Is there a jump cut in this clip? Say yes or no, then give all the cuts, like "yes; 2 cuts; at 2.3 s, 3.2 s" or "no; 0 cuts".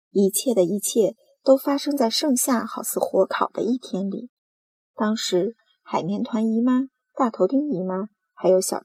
no; 0 cuts